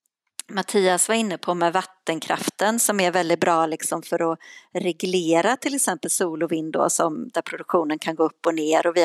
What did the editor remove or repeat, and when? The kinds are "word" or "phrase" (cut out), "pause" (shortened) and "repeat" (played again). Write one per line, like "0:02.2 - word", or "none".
none

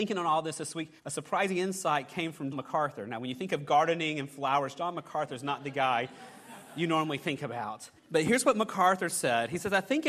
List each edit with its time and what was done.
0:01.0 - pause
0:02.5 - word
0:08.0 - pause

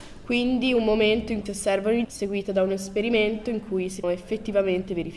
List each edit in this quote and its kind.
0:01.5 - word
0:02.0 - word
0:04.0 - word

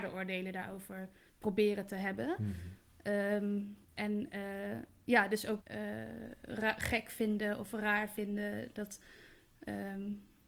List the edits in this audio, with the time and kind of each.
0:01.3 - pause
0:03.8 - pause
0:05.6 - word

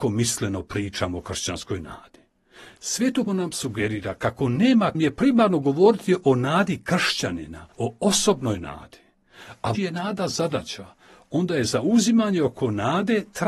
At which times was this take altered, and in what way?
0:03.3 - word
0:04.9 - phrase
0:07.7 - pause
0:09.7 - word

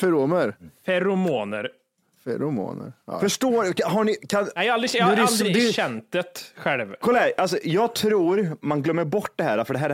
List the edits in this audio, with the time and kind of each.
none

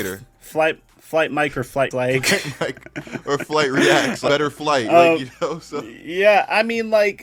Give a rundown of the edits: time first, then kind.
0:01.9 - word
0:04.3 - word

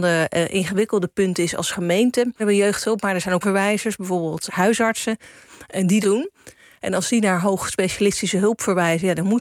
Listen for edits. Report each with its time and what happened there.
0:02.4 - word
0:03.4 - word
0:04.5 - word
0:06.0 - word

